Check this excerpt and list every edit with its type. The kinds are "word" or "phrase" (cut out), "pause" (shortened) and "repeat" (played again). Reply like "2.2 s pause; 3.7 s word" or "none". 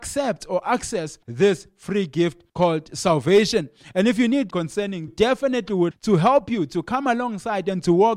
1.2 s pause; 2.5 s pause; 4.5 s phrase; 5.1 s phrase; 5.9 s word